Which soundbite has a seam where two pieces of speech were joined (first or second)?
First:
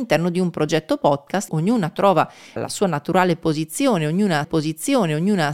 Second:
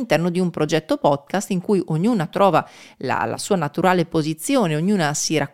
first